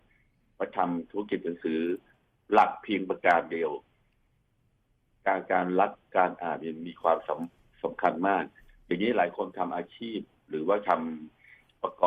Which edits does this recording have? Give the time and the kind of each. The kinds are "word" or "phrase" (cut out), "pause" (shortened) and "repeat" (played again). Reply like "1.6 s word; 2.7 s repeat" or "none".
none